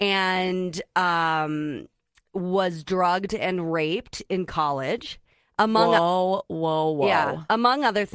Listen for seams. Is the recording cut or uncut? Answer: uncut